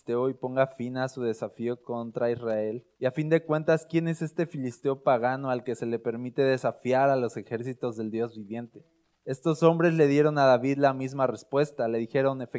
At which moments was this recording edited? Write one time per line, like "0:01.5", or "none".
0:02.9
0:09.1